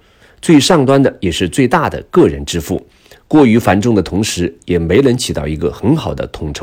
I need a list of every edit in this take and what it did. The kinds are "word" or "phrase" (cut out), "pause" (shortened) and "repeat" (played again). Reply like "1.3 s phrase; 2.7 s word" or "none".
none